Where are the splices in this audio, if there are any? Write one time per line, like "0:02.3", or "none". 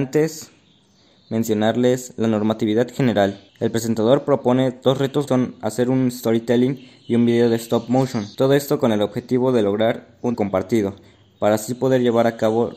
0:03.5
0:05.3
0:08.3
0:10.3